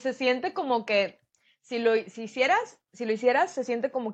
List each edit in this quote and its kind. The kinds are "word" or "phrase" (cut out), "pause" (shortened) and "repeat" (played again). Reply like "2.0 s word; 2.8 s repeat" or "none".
2.8 s pause